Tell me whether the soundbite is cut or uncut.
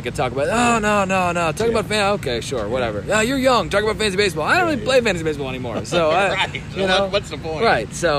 uncut